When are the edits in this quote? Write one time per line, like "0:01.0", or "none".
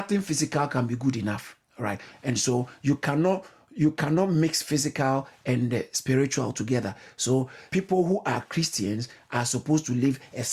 0:01.7
0:07.7